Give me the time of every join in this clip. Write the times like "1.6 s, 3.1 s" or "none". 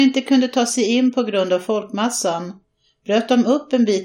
none